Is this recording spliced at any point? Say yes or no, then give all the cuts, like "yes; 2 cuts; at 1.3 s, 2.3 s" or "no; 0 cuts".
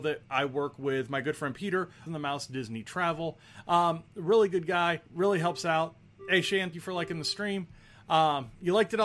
yes; 3 cuts; at 2.1 s, 5.1 s, 6.7 s